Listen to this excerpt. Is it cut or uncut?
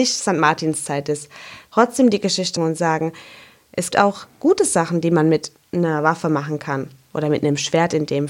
cut